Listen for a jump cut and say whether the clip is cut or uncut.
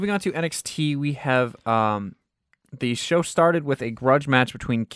uncut